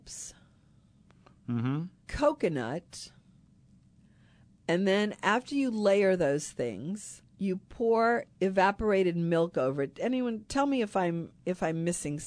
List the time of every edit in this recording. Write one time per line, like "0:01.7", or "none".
0:02.0
0:07.3